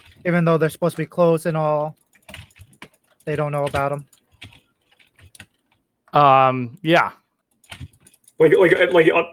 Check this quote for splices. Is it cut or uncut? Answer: uncut